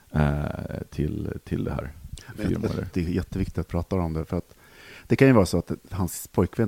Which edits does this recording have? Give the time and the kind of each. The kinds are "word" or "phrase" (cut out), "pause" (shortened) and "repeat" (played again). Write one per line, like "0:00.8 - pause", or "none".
0:02.9 - phrase
0:03.7 - word